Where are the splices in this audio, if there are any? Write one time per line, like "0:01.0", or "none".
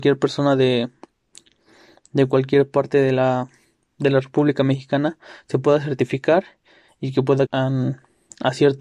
0:07.5